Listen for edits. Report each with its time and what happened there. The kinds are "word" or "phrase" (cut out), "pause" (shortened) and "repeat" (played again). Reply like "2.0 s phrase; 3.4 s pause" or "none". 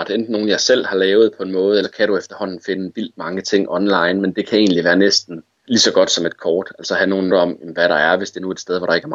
1.8 s word; 5.6 s word; 7.3 s word